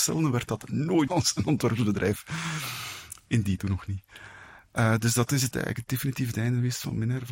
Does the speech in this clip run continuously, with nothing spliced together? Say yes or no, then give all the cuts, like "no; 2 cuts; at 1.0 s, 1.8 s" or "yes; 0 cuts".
no; 3 cuts; at 1.1 s, 3.6 s, 5.5 s